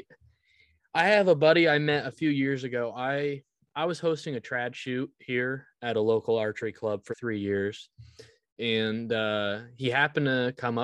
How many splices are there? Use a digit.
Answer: 1